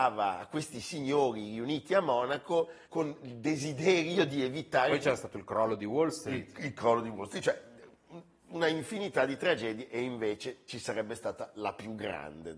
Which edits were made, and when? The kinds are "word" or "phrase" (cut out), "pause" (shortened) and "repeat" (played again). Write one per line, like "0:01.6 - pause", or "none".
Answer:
0:02.8 - pause